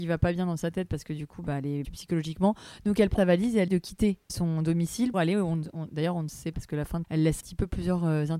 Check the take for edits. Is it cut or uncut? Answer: cut